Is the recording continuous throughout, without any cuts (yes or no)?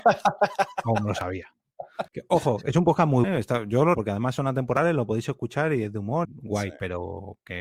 no